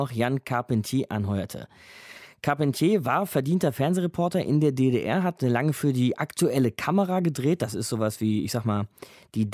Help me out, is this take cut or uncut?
uncut